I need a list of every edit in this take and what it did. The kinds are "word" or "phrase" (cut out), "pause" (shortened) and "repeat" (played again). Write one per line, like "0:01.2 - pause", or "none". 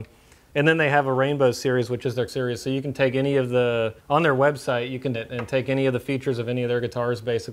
0:02.3 - word
0:04.0 - pause
0:05.1 - word